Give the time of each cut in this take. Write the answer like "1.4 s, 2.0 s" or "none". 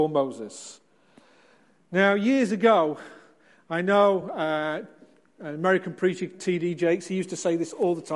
none